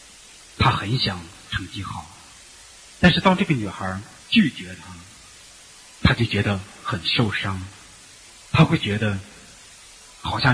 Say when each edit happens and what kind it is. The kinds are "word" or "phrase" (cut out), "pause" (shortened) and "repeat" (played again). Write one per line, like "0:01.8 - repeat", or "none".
0:04.2 - pause

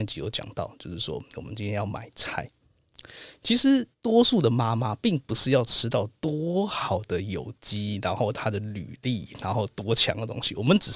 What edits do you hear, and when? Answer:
0:03.9 - pause

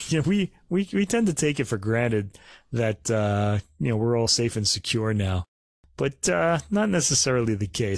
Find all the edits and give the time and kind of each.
none

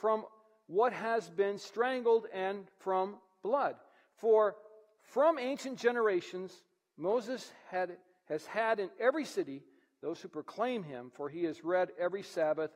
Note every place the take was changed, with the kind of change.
none

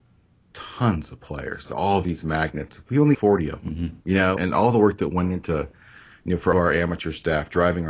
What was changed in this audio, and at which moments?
0:01.6 - word
0:03.1 - word
0:04.0 - pause
0:04.4 - word
0:06.5 - word

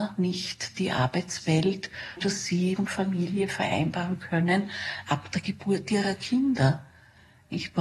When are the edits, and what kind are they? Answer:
0:02.2 - word
0:02.8 - word

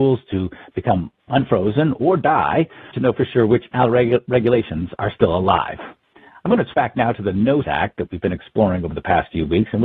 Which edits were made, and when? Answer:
0:02.9 - word
0:03.7 - word
0:05.0 - word
0:06.7 - word
0:07.6 - word

